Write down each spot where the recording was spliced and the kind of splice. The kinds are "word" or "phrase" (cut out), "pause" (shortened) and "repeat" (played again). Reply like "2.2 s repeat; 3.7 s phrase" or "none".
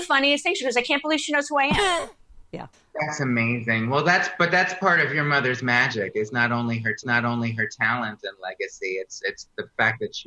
2.2 s pause; 2.7 s pause; 7.0 s repeat

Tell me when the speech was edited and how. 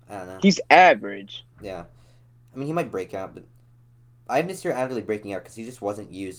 none

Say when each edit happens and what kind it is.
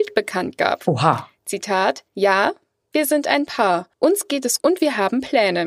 2.1 s pause; 3.9 s pause; 4.6 s word

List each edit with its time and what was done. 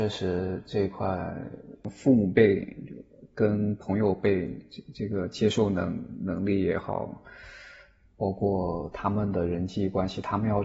none

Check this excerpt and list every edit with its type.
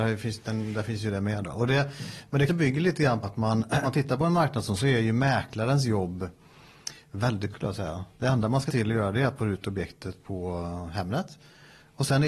2.5 s word; 3.2 s word; 3.8 s word; 4.8 s word; 7.5 s word; 8.7 s word; 9.4 s word

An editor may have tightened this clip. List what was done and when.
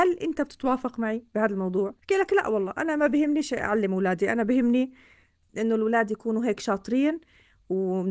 2.0 s pause

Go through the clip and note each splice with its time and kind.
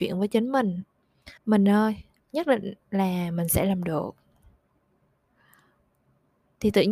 1.4 s pause; 2.2 s pause

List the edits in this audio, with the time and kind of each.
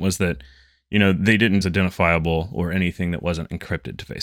1.6 s phrase

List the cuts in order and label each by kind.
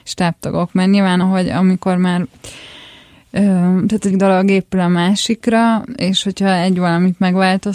1.2 s phrase; 4.1 s word

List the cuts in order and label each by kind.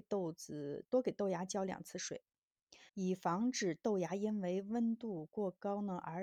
2.9 s pause

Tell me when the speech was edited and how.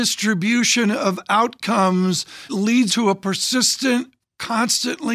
2.5 s word; 2.9 s word

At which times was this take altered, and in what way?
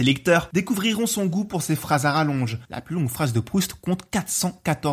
none

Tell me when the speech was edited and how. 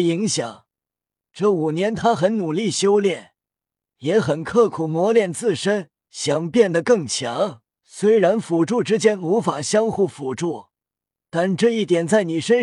6.0 s pause; 7.7 s pause

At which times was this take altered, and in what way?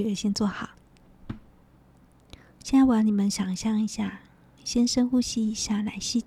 4.6 s word

